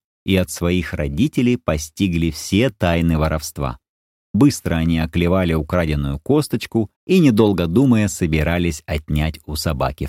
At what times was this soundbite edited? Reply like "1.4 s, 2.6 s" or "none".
4.3 s, 7.0 s